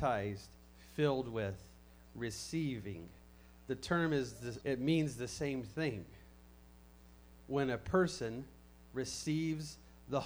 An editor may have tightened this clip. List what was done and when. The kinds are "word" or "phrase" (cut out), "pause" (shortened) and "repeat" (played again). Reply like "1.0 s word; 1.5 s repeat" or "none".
4.6 s word